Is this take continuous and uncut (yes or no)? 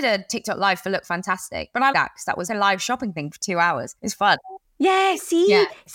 no